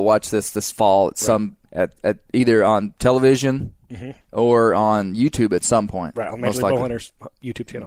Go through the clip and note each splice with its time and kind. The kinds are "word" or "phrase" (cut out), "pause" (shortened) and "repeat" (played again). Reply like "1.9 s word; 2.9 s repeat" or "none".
1.7 s pause; 4.2 s pause